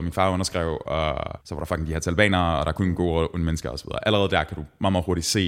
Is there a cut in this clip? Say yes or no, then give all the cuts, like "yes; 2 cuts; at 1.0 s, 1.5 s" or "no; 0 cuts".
yes; 1 cut; at 1.4 s